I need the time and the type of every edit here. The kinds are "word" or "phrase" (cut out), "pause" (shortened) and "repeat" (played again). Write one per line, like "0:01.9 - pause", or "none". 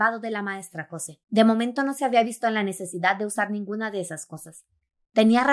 0:01.2 - pause